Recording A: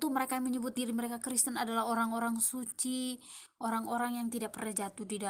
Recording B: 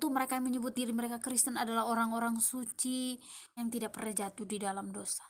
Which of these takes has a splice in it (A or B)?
B